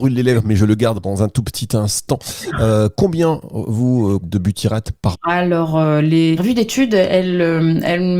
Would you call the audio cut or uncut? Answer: cut